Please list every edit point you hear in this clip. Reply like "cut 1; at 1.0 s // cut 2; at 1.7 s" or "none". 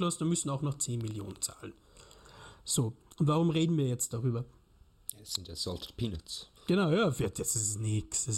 cut 1; at 6.6 s

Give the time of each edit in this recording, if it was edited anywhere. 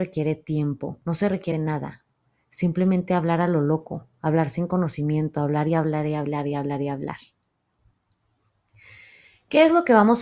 cut 1; at 1.0 s // cut 2; at 1.5 s

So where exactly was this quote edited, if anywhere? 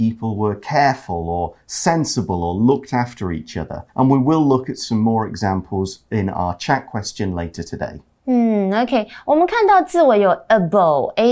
cut 1; at 3.9 s

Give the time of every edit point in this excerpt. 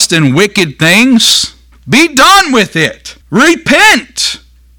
cut 1; at 1.7 s // cut 2; at 3.2 s

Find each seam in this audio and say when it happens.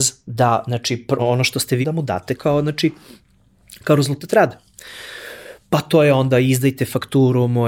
cut 1; at 1.2 s // cut 2; at 1.8 s // cut 3; at 2.4 s

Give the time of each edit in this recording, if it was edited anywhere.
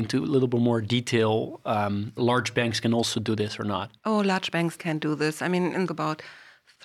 cut 1; at 2.2 s // cut 2; at 4.0 s // cut 3; at 4.8 s // cut 4; at 5.9 s

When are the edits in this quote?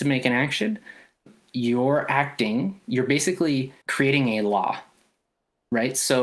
cut 1; at 1.3 s // cut 2; at 3.8 s

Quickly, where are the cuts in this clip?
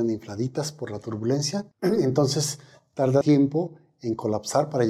cut 1; at 1.7 s // cut 2; at 3.2 s

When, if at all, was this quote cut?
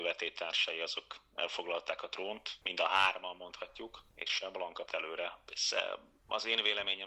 cut 1; at 2.6 s // cut 2; at 4.9 s

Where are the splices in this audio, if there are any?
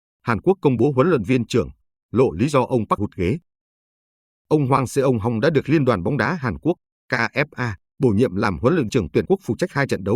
cut 1; at 3.0 s // cut 2; at 8.9 s // cut 3; at 9.3 s

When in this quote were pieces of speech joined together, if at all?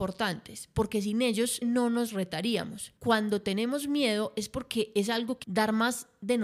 cut 1; at 1.6 s // cut 2; at 3.0 s // cut 3; at 5.4 s

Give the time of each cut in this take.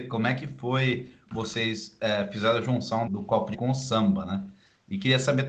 cut 1; at 1.3 s // cut 2; at 3.1 s // cut 3; at 3.5 s

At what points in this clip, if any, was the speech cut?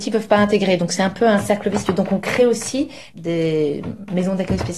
none

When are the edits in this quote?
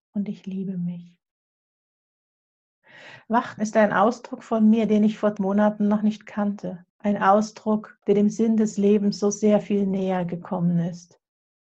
cut 1; at 3.6 s // cut 2; at 5.4 s // cut 3; at 6.9 s // cut 4; at 8.0 s

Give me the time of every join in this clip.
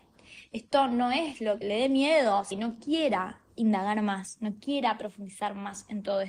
cut 1; at 1.6 s // cut 2; at 2.5 s

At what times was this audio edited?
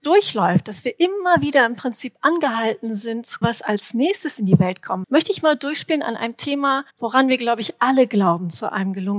cut 1; at 3.4 s // cut 2; at 5.0 s // cut 3; at 6.9 s

